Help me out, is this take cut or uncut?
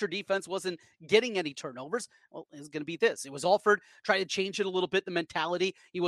uncut